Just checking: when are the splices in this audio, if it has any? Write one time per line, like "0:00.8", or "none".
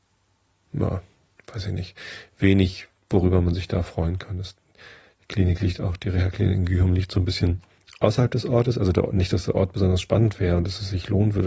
none